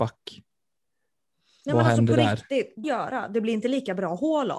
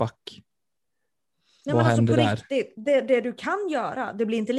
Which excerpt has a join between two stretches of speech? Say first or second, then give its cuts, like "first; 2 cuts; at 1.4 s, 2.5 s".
first; 1 cut; at 2.8 s